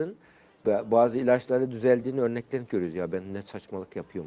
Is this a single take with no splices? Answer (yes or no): no